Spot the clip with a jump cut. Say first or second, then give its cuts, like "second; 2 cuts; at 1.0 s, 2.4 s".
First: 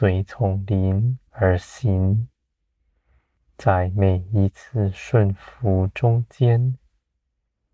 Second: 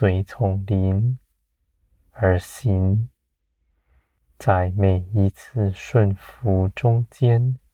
first; 1 cut; at 1.3 s